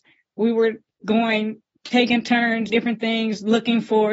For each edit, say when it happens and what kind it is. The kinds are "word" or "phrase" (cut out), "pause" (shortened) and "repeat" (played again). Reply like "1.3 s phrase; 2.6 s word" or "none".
1.0 s word; 2.7 s word